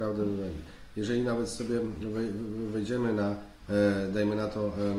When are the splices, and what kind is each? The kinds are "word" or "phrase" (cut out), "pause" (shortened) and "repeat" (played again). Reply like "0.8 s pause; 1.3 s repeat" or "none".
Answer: none